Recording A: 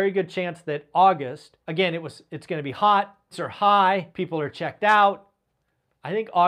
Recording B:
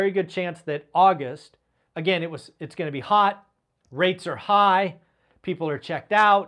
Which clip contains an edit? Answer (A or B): A